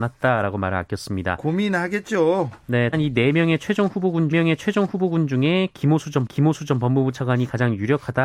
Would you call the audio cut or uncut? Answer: cut